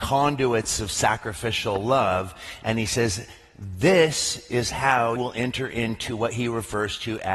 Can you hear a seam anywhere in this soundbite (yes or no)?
yes